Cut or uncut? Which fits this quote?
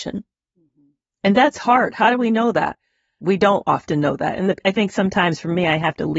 uncut